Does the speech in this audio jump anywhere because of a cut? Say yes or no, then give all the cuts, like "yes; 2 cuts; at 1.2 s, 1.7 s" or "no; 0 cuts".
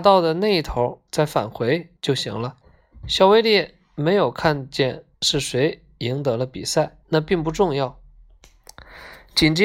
yes; 5 cuts; at 1.1 s, 2.0 s, 2.6 s, 5.1 s, 7.0 s